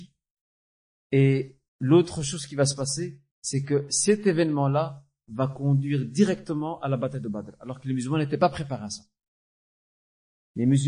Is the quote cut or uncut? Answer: cut